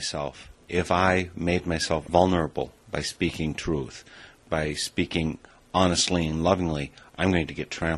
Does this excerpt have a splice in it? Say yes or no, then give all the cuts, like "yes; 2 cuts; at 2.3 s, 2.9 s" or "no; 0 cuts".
no; 0 cuts